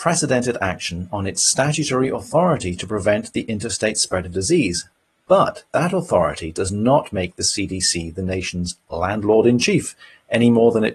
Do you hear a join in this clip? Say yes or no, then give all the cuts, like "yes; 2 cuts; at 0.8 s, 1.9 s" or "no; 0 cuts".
no; 0 cuts